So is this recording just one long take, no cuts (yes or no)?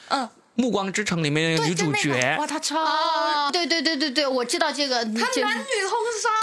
no